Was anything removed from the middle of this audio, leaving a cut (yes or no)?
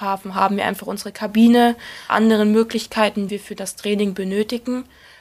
yes